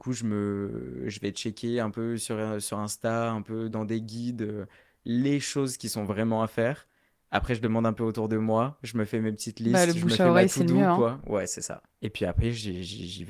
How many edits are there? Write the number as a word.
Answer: zero